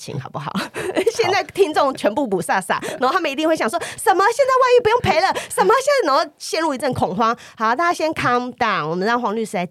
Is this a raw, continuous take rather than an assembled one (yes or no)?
yes